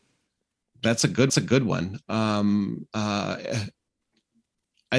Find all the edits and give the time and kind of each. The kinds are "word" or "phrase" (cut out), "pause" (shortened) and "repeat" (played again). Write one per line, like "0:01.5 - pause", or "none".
0:01.3 - repeat